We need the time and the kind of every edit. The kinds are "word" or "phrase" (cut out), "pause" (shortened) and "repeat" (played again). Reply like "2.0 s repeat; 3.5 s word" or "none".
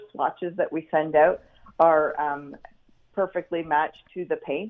none